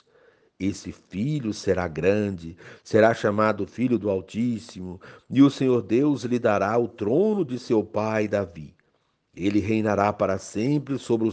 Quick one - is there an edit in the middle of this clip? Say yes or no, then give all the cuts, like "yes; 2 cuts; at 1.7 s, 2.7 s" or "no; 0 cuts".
no; 0 cuts